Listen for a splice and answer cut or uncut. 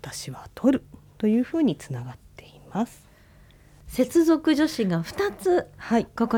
uncut